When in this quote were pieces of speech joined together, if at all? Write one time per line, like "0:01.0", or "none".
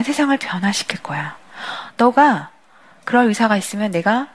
none